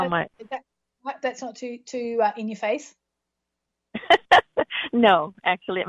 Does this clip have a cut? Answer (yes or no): no